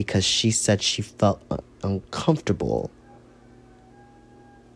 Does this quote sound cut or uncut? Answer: uncut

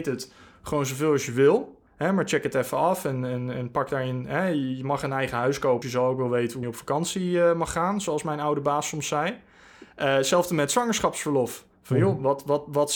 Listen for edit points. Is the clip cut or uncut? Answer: cut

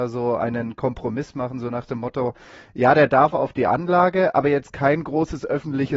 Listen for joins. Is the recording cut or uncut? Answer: uncut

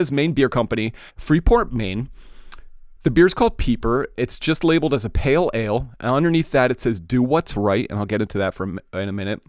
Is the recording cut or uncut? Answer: cut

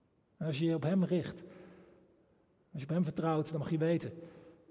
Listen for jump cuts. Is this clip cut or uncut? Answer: uncut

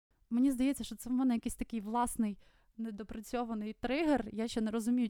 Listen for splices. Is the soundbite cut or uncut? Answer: uncut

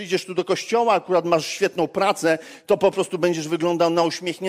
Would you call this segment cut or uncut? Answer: uncut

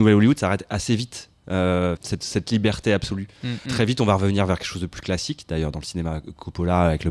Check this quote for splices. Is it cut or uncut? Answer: cut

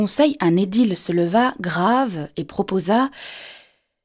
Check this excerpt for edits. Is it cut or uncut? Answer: uncut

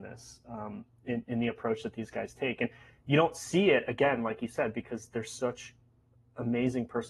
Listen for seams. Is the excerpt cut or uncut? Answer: uncut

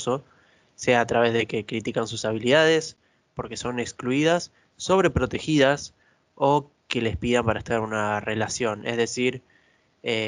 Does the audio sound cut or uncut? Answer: uncut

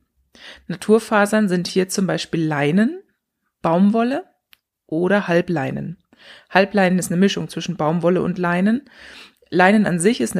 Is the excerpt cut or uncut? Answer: uncut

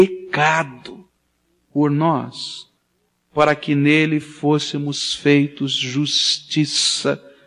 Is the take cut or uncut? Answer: uncut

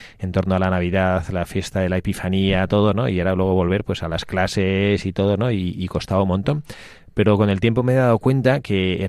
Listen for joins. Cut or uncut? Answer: uncut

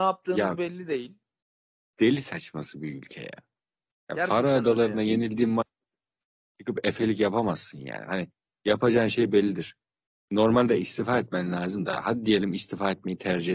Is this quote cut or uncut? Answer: uncut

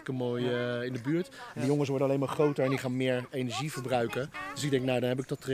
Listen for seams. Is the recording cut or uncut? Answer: uncut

